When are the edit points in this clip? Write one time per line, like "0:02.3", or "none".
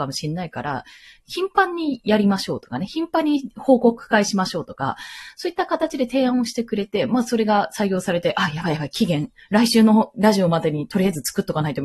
none